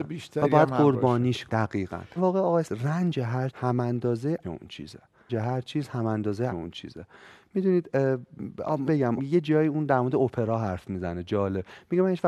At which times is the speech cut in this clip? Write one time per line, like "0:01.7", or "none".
0:01.5
0:02.2
0:02.6
0:03.5
0:04.4
0:05.3
0:06.5
0:08.9
0:09.2